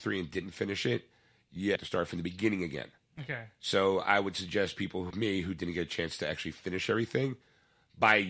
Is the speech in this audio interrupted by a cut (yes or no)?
yes